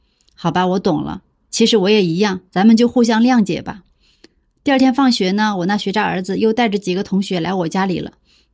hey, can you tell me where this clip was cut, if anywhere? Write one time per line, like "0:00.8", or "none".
0:02.5